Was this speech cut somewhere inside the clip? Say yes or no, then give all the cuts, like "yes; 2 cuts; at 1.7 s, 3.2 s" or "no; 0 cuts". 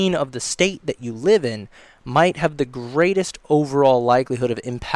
no; 0 cuts